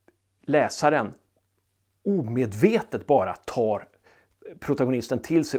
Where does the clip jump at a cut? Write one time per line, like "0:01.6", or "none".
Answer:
none